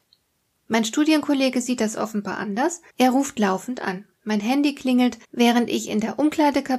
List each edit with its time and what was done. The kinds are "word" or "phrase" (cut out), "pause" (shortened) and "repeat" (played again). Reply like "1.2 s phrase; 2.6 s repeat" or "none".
2.9 s pause; 5.2 s pause